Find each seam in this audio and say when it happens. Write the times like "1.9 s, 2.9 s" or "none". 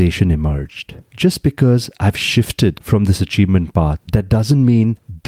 1.0 s, 4.0 s